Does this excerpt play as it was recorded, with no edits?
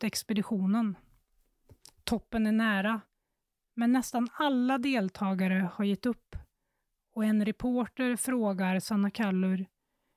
yes; 0 cuts

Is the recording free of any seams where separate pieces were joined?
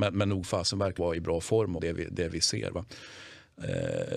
no; 2 cuts; at 1.0 s, 1.8 s

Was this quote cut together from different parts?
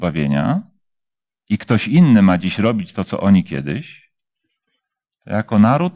no; 0 cuts

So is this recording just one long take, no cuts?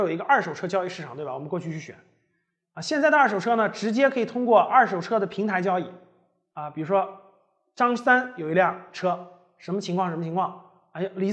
yes; 0 cuts

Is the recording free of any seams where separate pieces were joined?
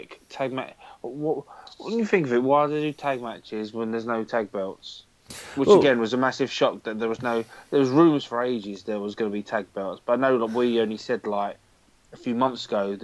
yes; 0 cuts

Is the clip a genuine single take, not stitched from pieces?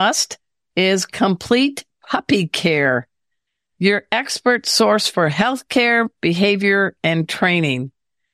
yes; 0 cuts

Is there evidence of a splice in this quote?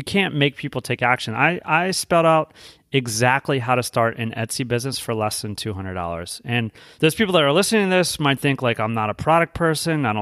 no; 0 cuts

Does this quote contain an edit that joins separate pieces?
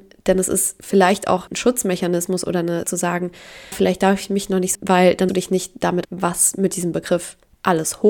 yes; 6 cuts; at 1.5 s, 2.8 s, 3.7 s, 4.7 s, 5.3 s, 6.0 s

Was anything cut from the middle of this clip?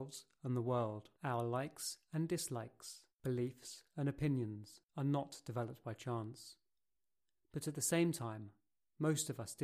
yes; 3 cuts; at 1.1 s, 3.1 s, 4.9 s

